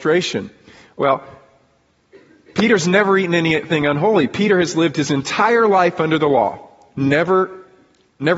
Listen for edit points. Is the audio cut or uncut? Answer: uncut